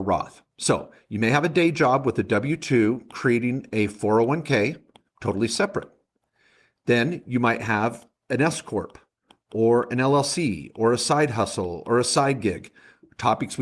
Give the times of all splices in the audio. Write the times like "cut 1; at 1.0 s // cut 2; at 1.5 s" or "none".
none